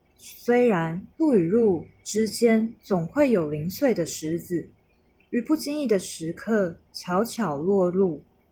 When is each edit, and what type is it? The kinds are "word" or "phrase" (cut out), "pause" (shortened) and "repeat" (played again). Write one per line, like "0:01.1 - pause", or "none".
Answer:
0:01.1 - pause
0:02.8 - pause